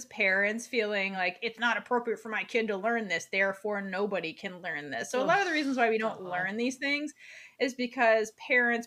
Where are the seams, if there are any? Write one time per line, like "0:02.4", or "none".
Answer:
none